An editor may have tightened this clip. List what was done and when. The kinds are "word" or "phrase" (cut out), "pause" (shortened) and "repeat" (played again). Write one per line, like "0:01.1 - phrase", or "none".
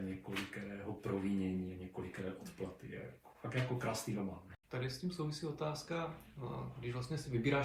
0:03.3 - pause
0:04.6 - pause